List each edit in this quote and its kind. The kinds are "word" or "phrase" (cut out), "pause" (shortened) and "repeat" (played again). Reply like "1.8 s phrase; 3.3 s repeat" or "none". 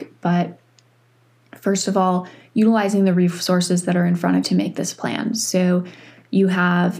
4.4 s word